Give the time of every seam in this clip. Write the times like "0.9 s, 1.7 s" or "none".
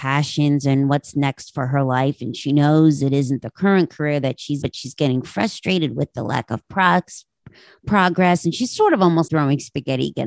4.6 s, 9.3 s